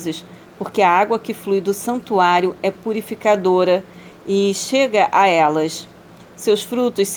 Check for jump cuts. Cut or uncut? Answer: uncut